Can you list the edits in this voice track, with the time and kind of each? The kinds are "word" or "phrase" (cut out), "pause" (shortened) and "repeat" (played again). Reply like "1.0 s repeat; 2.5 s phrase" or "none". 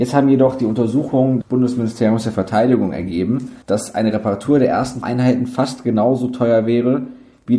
1.4 s word; 3.6 s pause; 5.0 s word